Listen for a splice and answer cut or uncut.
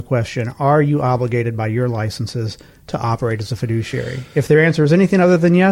uncut